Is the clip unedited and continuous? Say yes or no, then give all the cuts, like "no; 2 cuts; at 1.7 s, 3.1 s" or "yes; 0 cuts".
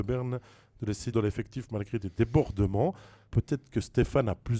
no; 2 cuts; at 1.1 s, 3.3 s